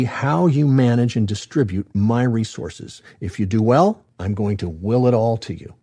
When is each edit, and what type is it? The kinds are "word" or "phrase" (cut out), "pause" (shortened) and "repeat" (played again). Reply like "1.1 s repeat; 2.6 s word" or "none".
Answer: 4.1 s pause